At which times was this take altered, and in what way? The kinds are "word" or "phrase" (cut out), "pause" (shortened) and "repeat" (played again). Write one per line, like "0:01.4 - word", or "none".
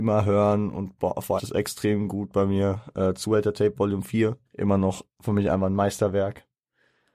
0:01.4 - phrase
0:04.5 - pause